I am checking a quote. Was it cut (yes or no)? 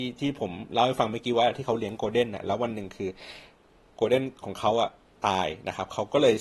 no